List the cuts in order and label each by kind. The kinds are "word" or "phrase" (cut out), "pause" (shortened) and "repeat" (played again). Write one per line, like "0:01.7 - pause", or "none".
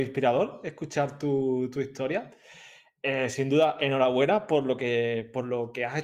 none